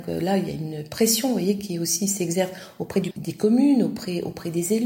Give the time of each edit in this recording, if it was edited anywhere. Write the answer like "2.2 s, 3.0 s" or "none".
3.1 s